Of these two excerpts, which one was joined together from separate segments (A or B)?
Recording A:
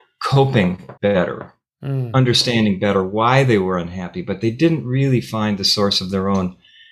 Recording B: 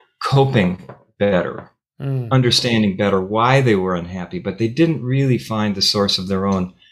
A